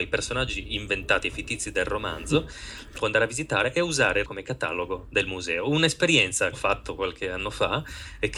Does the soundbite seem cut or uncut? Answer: cut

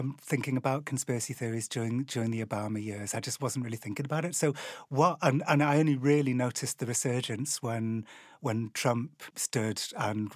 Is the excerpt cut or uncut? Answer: uncut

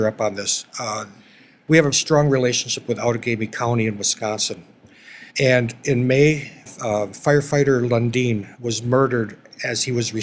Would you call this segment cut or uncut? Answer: cut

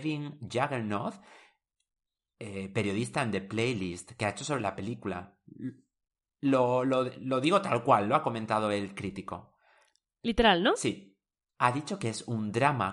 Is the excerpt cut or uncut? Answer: uncut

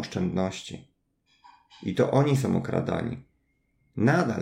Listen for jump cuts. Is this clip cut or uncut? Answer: uncut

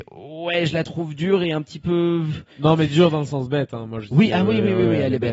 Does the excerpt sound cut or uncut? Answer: cut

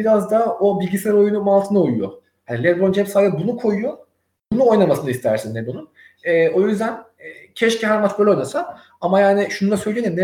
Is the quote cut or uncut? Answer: uncut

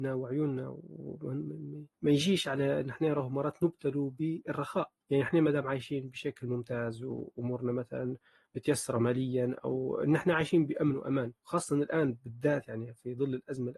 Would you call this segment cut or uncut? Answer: cut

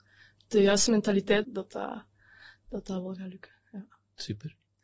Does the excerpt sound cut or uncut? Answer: cut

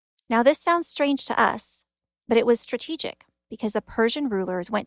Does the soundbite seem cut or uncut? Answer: uncut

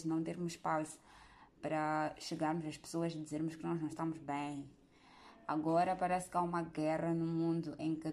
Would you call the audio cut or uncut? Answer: uncut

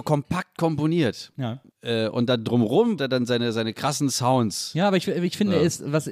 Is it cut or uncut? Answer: cut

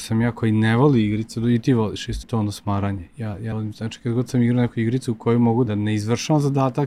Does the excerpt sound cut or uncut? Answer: cut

